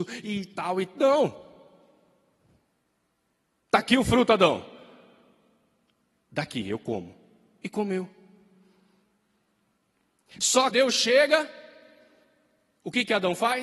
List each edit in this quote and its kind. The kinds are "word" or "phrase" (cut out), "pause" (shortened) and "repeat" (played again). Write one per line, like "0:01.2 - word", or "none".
0:10.7 - phrase